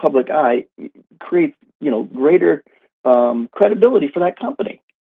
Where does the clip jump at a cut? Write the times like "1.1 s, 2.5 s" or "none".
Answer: none